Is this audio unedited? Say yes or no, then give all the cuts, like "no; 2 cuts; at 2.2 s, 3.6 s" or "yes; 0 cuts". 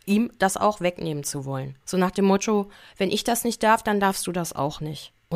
yes; 0 cuts